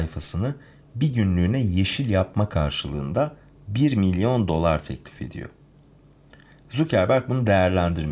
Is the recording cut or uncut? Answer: uncut